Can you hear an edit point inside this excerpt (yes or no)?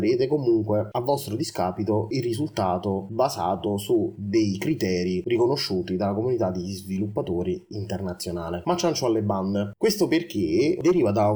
no